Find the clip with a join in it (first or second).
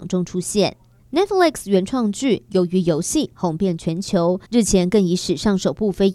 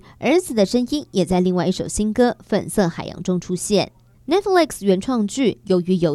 first